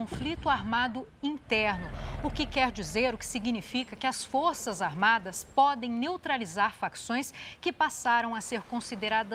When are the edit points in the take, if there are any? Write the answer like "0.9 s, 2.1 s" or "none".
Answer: none

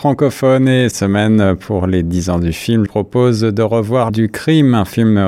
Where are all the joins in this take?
0.9 s, 2.9 s, 4.1 s

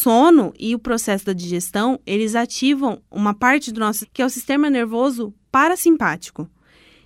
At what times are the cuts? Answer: 3.0 s, 4.0 s

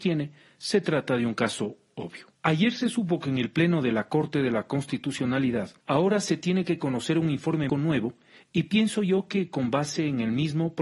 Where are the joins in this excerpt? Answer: 2.4 s, 5.8 s, 7.7 s

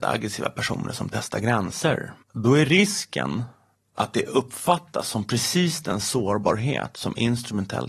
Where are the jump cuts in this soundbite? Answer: 2.2 s, 3.7 s

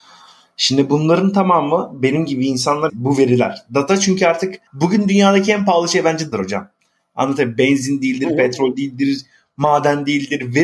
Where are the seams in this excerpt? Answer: 2.9 s, 4.7 s, 6.3 s

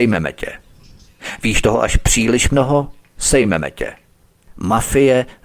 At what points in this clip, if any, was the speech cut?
none

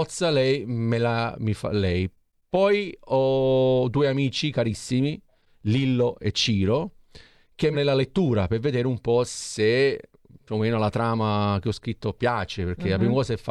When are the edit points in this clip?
7.7 s

